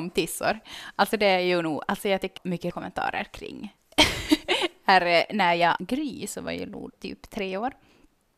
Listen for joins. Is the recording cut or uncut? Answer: cut